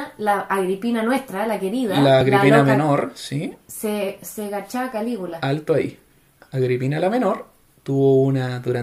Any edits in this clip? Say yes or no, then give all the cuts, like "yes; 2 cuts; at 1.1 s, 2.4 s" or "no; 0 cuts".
no; 0 cuts